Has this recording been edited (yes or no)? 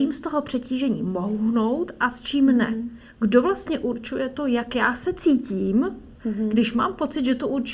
yes